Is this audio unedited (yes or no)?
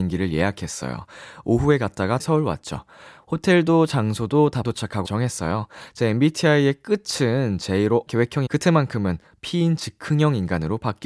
no